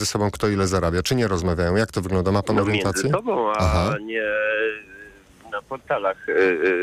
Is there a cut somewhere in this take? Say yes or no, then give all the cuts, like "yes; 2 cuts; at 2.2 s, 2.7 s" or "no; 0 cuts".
no; 0 cuts